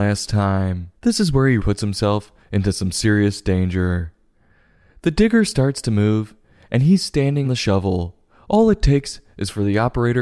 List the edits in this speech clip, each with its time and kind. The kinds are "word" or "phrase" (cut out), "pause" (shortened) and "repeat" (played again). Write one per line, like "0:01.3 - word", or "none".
0:01.0 - pause
0:01.6 - word
0:07.4 - word